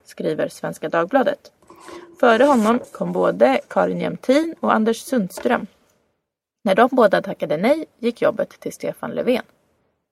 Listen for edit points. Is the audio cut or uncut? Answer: uncut